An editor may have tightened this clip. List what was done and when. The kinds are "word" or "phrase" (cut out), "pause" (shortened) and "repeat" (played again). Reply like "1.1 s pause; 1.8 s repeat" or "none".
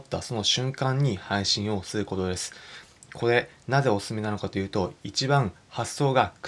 none